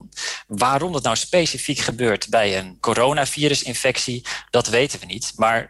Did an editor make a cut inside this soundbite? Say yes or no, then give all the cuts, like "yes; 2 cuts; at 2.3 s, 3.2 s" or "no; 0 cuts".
yes; 1 cut; at 2.8 s